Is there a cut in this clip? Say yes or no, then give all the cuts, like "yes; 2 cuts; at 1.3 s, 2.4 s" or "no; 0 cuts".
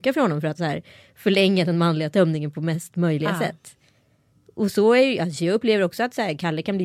no; 0 cuts